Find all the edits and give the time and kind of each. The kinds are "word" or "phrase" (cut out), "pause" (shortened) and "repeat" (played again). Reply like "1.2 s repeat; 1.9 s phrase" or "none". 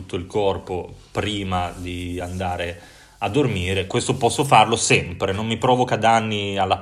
none